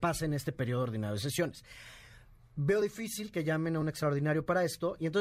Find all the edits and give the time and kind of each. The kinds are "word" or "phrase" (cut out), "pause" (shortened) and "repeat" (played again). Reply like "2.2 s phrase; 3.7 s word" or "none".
none

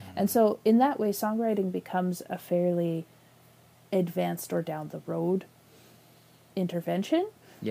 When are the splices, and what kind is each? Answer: none

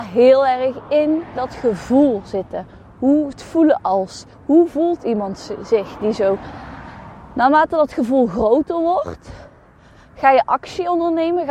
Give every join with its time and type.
3.3 s word; 4.3 s pause

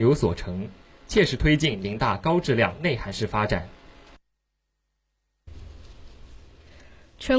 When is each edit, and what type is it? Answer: none

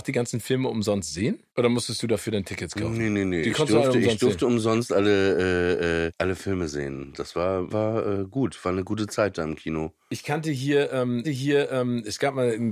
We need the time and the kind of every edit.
1.5 s pause; 6.1 s word; 7.7 s word; 11.2 s repeat

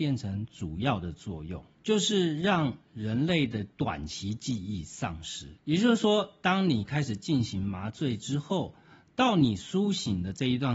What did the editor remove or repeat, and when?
1.8 s pause; 3.7 s pause; 5.6 s pause

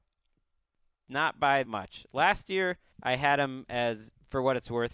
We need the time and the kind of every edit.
1.6 s word; 2.9 s pause

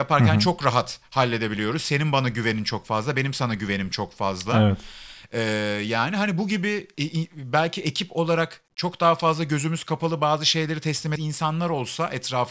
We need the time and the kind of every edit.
11.2 s word

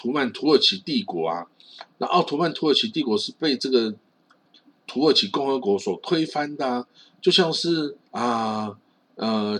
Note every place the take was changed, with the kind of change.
8.0 s pause

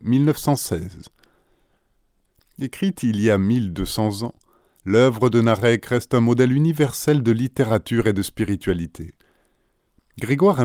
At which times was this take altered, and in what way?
none

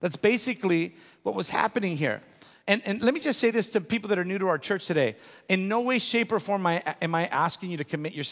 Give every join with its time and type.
none

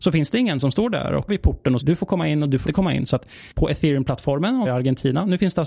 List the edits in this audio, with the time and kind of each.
1.3 s word; 1.8 s word; 2.6 s word; 4.6 s word

